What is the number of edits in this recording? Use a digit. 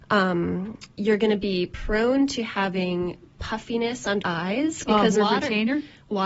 2